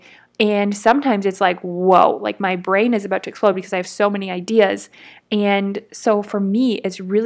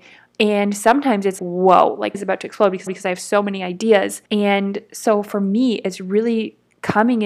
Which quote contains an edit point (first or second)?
second